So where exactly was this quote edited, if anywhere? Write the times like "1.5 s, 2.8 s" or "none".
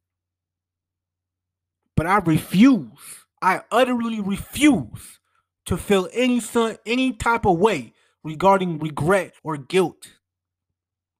3.3 s, 9.4 s